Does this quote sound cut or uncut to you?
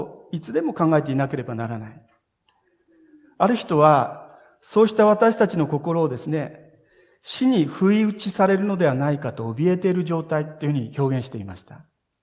uncut